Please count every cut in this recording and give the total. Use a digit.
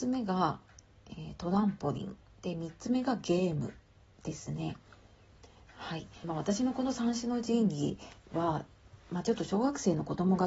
1